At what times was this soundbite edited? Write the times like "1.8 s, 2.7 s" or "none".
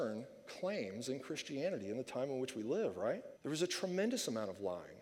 3.3 s